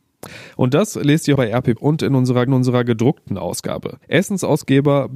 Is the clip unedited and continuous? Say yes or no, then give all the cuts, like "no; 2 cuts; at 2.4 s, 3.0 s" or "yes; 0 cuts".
no; 4 cuts; at 1.4 s, 1.8 s, 2.5 s, 4.0 s